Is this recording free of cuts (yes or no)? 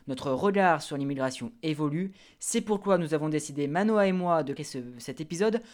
no